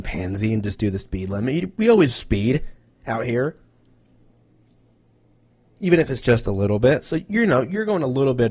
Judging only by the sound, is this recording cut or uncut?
uncut